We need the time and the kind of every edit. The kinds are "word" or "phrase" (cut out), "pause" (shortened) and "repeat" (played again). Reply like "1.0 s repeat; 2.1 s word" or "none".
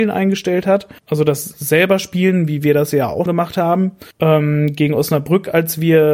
1.0 s pause; 3.3 s word; 4.1 s pause